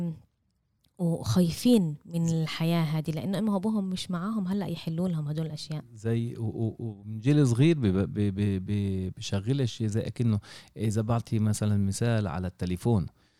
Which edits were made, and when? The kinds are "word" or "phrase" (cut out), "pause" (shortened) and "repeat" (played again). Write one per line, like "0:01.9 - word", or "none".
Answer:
none